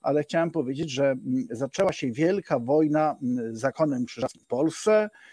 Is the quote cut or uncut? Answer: uncut